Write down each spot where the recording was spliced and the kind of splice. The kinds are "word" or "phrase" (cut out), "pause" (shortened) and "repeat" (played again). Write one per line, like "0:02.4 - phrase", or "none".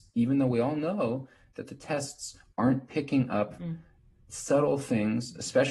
none